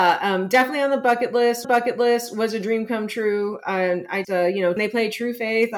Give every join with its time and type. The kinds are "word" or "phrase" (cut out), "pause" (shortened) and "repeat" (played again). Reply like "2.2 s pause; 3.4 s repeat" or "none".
1.6 s repeat; 4.2 s word; 4.8 s phrase